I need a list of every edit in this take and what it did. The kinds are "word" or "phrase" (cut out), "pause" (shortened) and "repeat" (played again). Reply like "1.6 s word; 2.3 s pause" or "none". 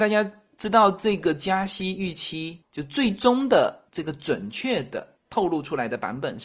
3.9 s pause

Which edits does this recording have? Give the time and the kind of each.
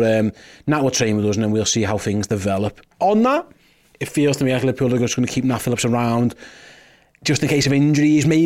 none

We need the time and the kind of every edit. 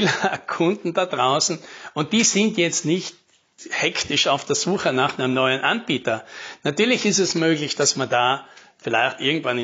none

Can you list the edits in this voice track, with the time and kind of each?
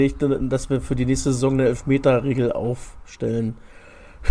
none

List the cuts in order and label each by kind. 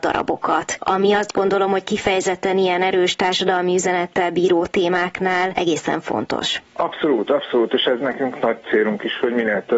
6.6 s pause

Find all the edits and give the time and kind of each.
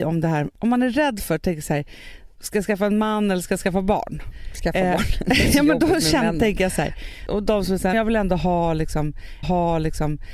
7.9 s word; 9.4 s repeat

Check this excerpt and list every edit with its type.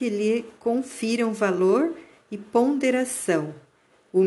none

